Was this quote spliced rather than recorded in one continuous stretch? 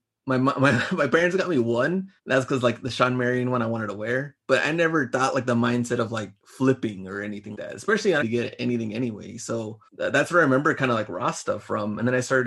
yes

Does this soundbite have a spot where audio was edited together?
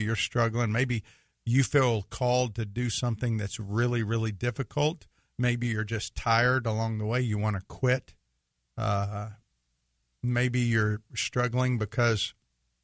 no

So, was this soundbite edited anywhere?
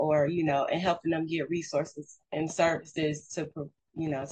no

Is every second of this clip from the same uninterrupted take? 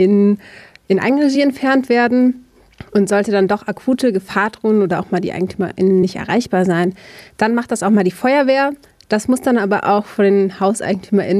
yes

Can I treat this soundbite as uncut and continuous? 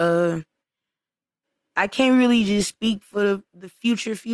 yes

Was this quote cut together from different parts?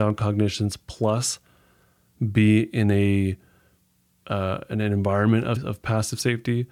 yes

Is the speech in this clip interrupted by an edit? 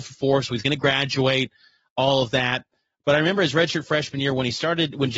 no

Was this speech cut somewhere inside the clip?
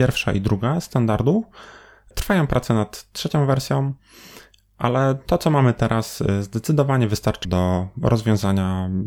yes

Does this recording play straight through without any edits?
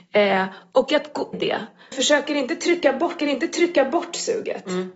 no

